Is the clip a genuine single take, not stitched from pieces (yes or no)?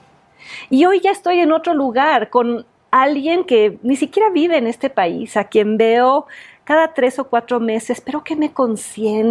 yes